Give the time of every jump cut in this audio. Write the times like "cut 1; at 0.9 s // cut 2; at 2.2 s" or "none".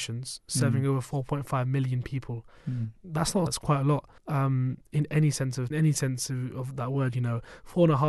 cut 1; at 3.5 s // cut 2; at 4.2 s // cut 3; at 5.7 s